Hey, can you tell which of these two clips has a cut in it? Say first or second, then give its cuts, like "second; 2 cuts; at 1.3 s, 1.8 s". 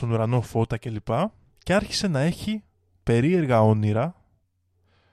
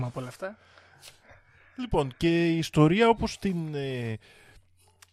first; 1 cut; at 1.6 s